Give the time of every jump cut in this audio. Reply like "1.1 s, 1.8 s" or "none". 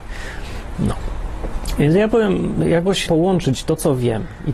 3.1 s